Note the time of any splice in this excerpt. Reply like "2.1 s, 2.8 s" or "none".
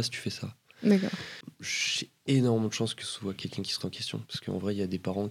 3.0 s, 3.8 s